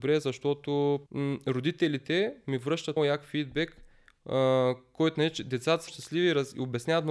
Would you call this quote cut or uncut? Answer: cut